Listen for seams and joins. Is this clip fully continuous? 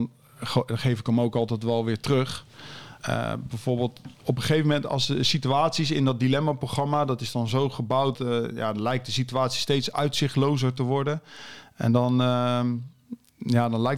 no; 3 cuts; at 3.0 s, 4.1 s, 8.1 s

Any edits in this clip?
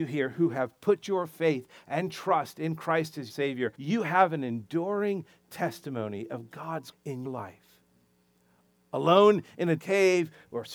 yes; 5 cuts; at 3.3 s, 3.7 s, 6.9 s, 7.2 s, 9.8 s

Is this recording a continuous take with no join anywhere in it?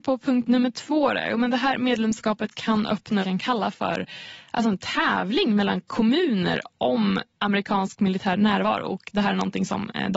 no; 1 cut; at 3.2 s

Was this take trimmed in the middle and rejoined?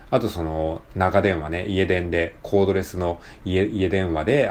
yes; 1 cut; at 1.6 s

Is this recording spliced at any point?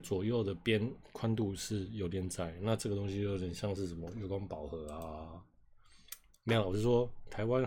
no; 0 cuts

